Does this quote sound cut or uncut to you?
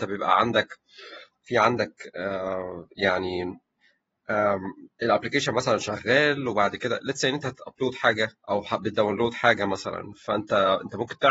cut